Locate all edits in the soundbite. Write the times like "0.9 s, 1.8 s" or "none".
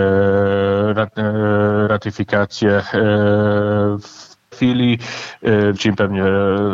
4.5 s, 5.8 s